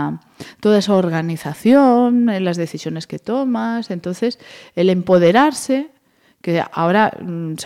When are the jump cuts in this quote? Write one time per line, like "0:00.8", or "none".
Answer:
none